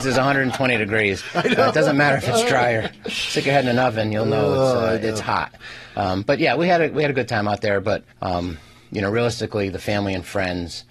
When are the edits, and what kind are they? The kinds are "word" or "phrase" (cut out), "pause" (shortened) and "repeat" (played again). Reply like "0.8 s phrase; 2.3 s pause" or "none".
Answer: 8.1 s pause